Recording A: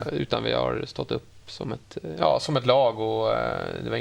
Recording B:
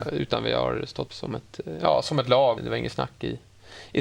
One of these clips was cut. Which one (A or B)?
B